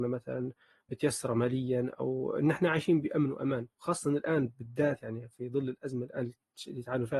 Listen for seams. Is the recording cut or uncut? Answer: uncut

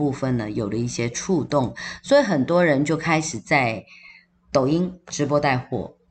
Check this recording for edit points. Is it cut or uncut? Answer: uncut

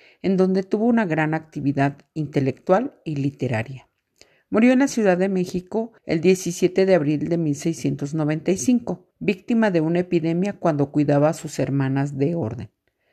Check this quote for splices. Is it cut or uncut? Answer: cut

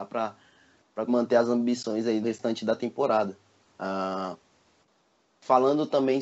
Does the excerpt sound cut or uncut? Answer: cut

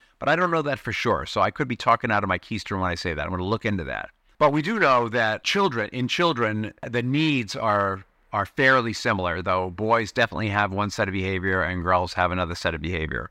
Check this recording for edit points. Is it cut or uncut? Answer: uncut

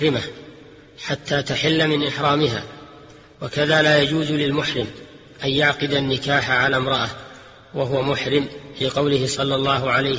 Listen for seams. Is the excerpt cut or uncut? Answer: uncut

